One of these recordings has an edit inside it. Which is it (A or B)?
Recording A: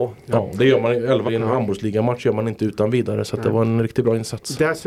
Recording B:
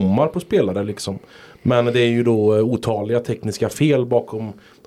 A